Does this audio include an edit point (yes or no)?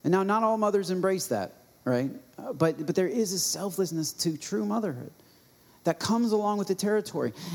no